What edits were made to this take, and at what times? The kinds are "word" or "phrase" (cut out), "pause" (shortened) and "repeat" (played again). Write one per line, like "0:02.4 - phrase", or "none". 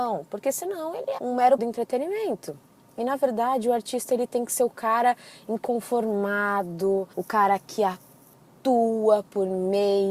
0:01.2 - word
0:01.6 - word
0:07.1 - pause